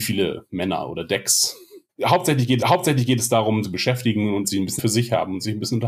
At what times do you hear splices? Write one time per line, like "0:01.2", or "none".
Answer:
0:01.9
0:02.6
0:03.6
0:04.4
0:04.8